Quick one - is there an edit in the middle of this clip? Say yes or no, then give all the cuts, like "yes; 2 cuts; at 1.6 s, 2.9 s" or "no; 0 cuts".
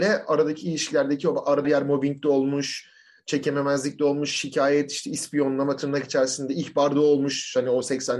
yes; 1 cut; at 1.6 s